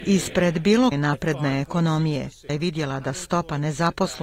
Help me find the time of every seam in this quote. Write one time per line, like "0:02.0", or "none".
0:00.9
0:02.5